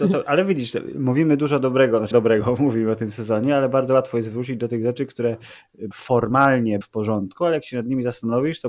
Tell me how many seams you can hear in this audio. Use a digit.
3